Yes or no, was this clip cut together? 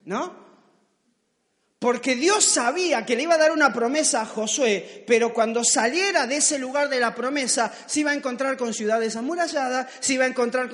no